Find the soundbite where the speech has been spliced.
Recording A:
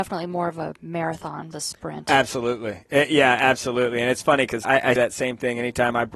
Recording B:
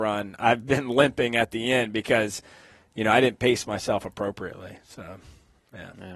A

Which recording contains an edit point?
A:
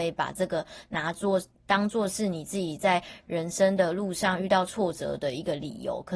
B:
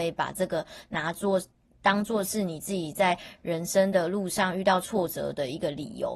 A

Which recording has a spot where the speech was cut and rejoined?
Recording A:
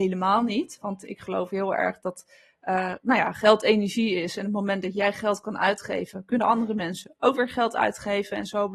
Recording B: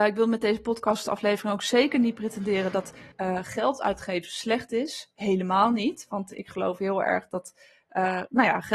B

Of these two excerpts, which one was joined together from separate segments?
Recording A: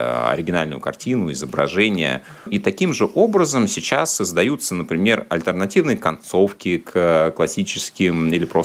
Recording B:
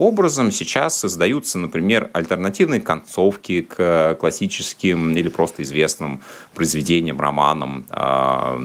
A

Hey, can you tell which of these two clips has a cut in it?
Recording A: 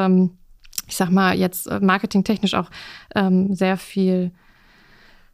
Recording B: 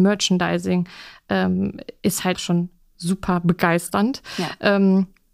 B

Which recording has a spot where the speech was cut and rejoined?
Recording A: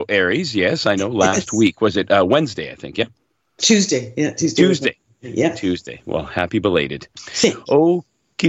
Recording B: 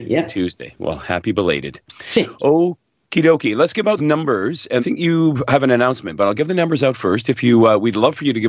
B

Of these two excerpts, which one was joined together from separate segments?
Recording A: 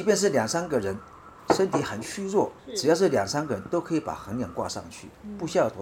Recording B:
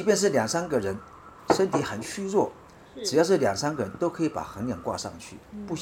A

